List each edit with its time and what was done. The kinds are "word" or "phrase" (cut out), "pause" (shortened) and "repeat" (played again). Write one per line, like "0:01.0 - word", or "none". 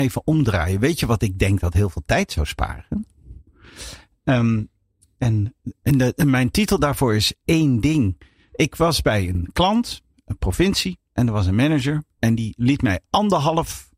none